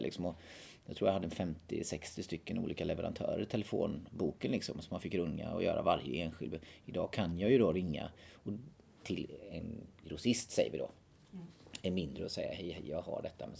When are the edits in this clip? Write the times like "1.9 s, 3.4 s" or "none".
none

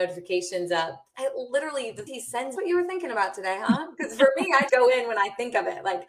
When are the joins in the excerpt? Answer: 1.1 s, 2.1 s, 2.6 s, 4.7 s

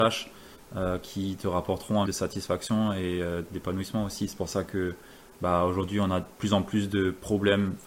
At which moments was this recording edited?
2.1 s

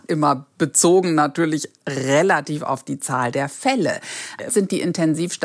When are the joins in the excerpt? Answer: 4.5 s

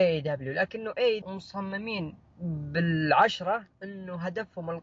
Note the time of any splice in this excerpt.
1.2 s

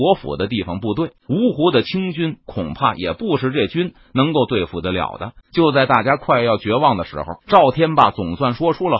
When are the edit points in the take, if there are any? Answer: 1.2 s, 5.4 s, 7.4 s

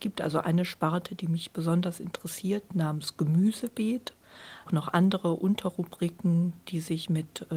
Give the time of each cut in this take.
4.7 s

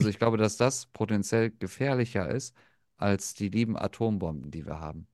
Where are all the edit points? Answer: none

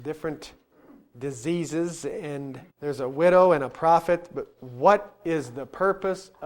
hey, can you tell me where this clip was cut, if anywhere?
2.7 s

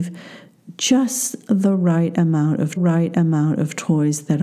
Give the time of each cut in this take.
2.8 s

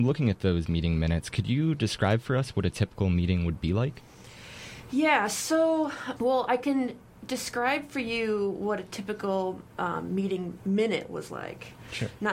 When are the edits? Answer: none

